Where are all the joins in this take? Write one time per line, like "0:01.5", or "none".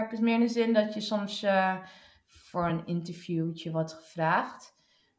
none